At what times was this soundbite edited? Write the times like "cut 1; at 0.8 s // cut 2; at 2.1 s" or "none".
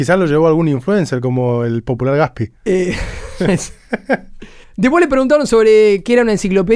cut 1; at 2.6 s // cut 2; at 4.6 s